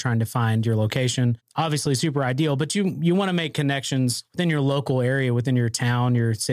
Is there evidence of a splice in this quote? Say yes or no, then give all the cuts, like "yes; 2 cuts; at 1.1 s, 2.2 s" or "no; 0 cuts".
no; 0 cuts